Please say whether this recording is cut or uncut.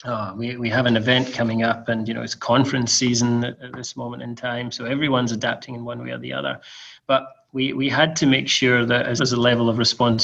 cut